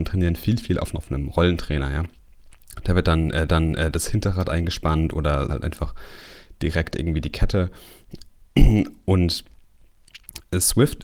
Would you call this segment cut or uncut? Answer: cut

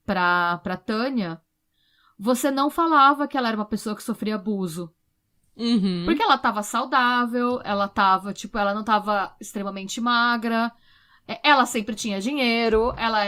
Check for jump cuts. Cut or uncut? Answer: uncut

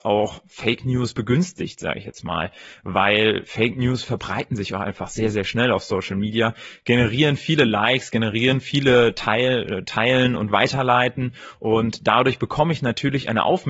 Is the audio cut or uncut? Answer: uncut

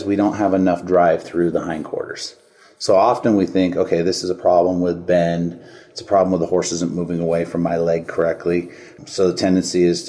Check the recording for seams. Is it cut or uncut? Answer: uncut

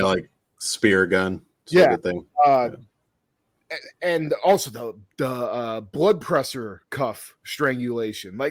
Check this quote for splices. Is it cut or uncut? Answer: uncut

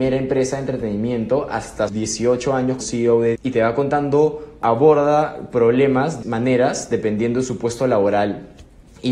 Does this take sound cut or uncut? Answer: cut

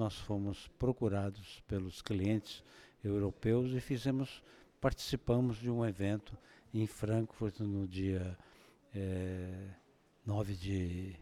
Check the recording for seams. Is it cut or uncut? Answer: uncut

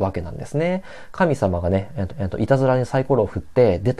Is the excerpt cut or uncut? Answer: cut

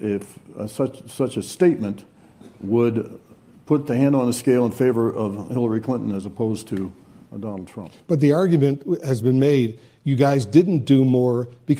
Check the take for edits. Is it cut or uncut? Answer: uncut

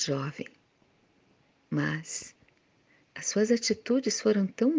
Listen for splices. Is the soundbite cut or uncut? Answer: uncut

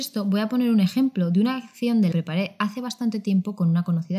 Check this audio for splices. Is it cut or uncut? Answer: cut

